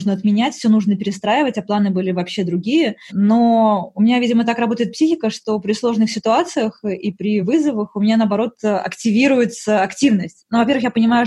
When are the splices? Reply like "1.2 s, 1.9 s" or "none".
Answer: none